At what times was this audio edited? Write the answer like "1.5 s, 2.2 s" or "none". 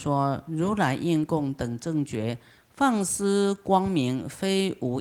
none